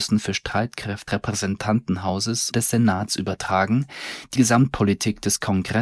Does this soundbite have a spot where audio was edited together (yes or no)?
yes